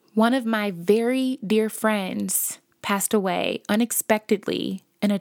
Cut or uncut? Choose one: uncut